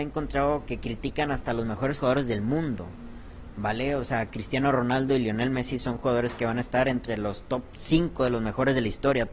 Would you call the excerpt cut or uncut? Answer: uncut